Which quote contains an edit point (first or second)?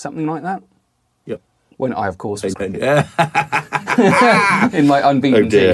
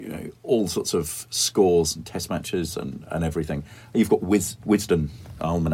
first